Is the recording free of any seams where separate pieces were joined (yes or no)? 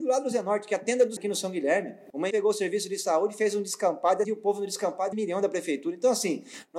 no